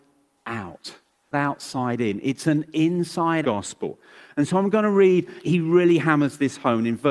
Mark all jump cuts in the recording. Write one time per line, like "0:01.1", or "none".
0:01.3
0:03.4
0:05.4